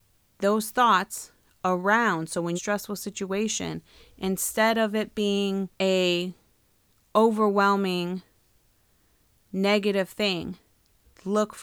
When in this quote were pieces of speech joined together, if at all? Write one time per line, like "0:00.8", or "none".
0:02.5
0:05.7